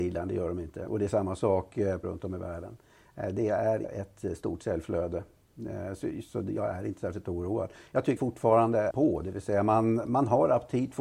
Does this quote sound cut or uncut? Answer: cut